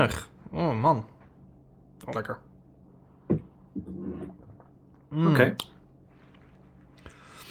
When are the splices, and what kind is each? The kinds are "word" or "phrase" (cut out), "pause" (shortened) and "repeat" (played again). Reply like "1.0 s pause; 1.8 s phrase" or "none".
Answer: 2.1 s word